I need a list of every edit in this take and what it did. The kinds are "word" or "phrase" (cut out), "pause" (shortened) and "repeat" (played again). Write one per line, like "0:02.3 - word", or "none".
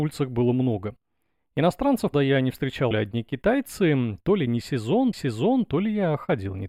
0:02.1 - word
0:02.9 - phrase
0:05.1 - repeat